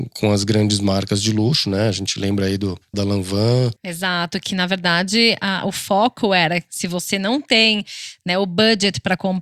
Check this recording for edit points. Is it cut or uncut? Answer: cut